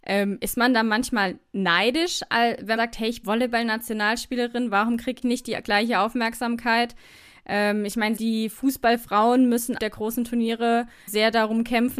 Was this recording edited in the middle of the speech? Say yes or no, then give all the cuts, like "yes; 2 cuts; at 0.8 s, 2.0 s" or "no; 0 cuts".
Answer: yes; 6 cuts; at 2.8 s, 3.2 s, 5.2 s, 8.2 s, 9.8 s, 11.1 s